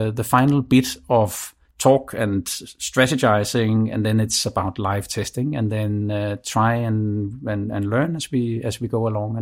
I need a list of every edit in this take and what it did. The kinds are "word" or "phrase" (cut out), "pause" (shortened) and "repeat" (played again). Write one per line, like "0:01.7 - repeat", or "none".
0:01.6 - pause

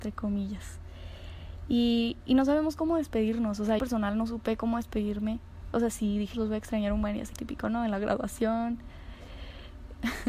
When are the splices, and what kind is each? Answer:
0:03.8 - phrase
0:06.3 - word
0:07.3 - word

